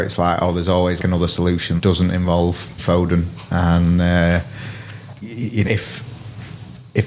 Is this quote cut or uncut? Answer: cut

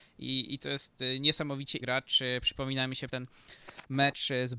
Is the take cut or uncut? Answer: cut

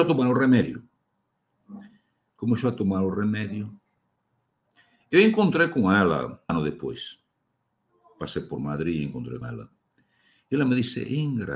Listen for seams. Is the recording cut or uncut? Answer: cut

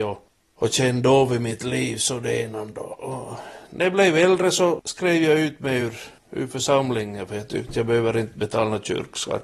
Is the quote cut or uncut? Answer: uncut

